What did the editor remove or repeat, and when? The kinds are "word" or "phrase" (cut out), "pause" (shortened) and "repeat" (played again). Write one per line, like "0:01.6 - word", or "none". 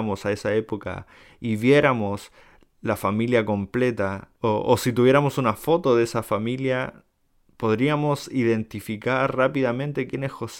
none